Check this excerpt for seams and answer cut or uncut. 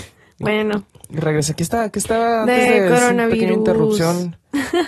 uncut